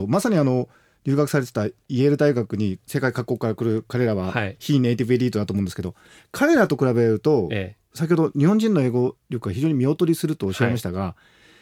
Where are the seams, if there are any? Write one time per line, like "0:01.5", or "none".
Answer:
none